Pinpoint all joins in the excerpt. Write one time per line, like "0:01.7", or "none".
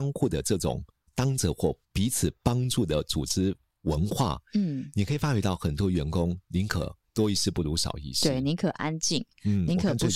0:01.8